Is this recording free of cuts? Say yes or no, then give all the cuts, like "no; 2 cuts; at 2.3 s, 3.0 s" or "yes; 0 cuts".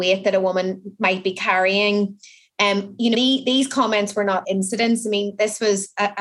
no; 2 cuts; at 3.1 s, 4.4 s